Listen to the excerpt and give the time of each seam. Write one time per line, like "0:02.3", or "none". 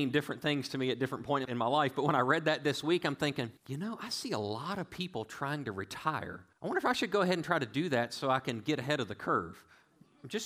0:03.6
0:06.5